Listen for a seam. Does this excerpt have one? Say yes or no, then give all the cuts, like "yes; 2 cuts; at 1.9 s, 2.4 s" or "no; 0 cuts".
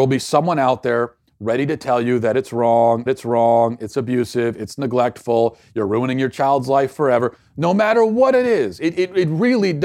yes; 1 cut; at 3.1 s